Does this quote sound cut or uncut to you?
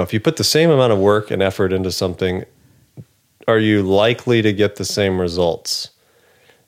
uncut